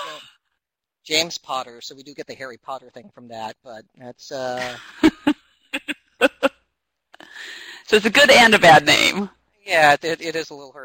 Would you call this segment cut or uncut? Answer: uncut